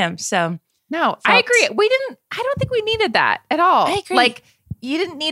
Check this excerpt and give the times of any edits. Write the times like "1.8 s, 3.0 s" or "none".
none